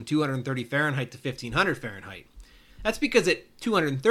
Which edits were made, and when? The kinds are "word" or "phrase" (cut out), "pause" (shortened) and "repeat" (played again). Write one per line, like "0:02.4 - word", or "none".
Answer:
none